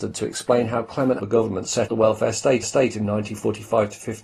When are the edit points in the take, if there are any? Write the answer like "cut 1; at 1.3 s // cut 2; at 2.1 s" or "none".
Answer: cut 1; at 1.2 s // cut 2; at 1.9 s // cut 3; at 2.6 s

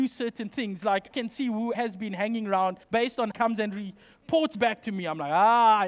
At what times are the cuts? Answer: cut 1; at 1.1 s // cut 2; at 1.7 s // cut 3; at 2.8 s // cut 4; at 3.3 s // cut 5; at 4.5 s

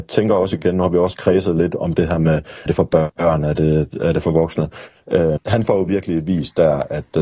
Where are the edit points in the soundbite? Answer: cut 1; at 2.7 s // cut 2; at 5.4 s

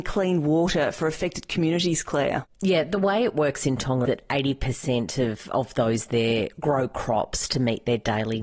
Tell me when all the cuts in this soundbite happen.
cut 1; at 4.1 s

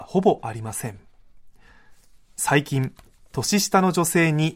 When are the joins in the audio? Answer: none

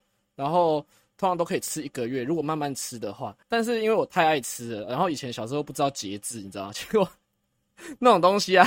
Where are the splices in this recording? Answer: cut 1; at 3.4 s

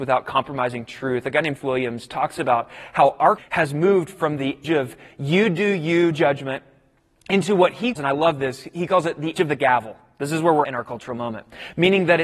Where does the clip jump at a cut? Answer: cut 1; at 1.6 s // cut 2; at 3.4 s // cut 3; at 4.6 s // cut 4; at 6.1 s // cut 5; at 8.0 s // cut 6; at 9.4 s // cut 7; at 10.6 s

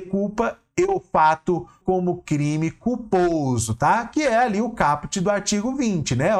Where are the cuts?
cut 1; at 1.8 s

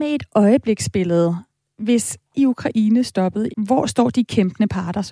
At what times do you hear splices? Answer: cut 1; at 2.3 s // cut 2; at 3.5 s

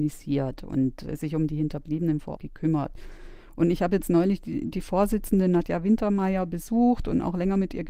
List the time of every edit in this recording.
cut 1; at 2.4 s

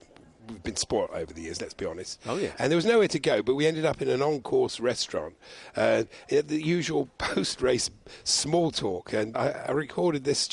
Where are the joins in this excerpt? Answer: cut 1; at 9.3 s

